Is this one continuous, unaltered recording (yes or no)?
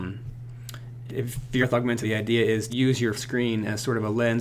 no